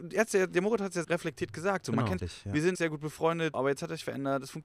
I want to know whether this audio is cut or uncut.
cut